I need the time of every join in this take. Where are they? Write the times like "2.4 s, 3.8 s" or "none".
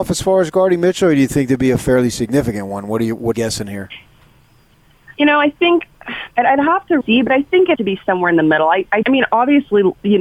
3.3 s, 5.1 s, 6.3 s, 7.0 s, 7.7 s, 9.0 s